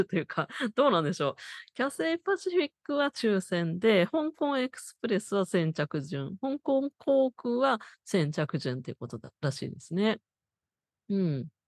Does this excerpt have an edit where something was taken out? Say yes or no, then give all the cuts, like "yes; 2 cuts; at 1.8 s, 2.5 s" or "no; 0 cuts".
no; 0 cuts